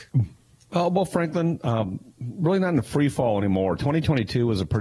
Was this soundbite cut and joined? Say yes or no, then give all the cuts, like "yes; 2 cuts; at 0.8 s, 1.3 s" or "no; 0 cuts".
no; 0 cuts